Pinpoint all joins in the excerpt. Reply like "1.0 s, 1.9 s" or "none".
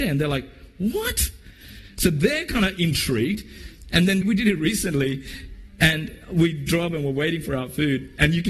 4.2 s